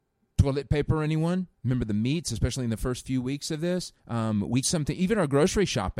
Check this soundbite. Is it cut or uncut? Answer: cut